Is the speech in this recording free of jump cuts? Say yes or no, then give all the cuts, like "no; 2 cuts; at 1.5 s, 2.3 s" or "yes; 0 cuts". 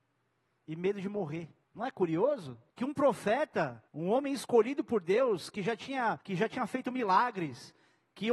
no; 4 cuts; at 1.6 s, 2.7 s, 3.9 s, 6.2 s